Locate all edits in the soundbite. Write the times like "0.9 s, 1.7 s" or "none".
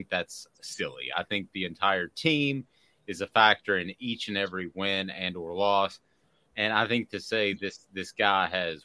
none